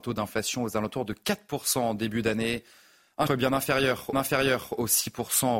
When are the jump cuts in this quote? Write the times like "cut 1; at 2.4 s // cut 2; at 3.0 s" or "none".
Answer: cut 1; at 3.3 s // cut 2; at 4.1 s